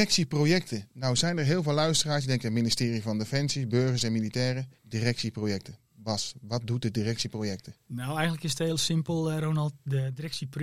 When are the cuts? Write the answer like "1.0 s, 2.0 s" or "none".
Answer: 4.8 s, 7.8 s